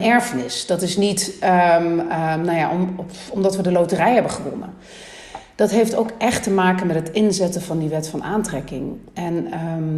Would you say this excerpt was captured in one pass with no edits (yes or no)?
yes